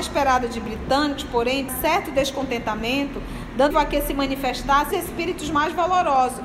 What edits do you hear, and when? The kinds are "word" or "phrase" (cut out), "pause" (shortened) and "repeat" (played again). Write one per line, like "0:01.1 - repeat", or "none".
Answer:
0:01.7 - word
0:03.7 - word
0:04.9 - word